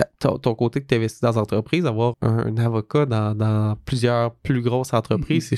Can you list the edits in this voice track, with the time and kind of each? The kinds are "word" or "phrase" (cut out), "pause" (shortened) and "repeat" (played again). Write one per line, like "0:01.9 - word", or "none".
0:02.1 - word